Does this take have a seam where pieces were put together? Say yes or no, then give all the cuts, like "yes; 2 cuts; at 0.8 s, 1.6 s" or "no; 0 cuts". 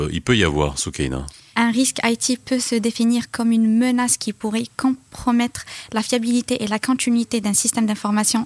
no; 0 cuts